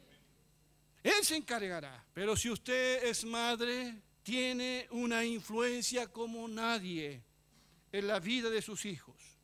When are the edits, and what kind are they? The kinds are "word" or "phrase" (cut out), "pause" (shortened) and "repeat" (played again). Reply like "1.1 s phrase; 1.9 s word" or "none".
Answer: 2.1 s pause; 4.1 s pause